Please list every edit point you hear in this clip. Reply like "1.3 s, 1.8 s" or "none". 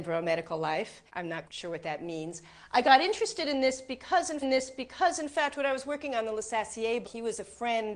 1.1 s, 1.4 s, 4.4 s, 7.0 s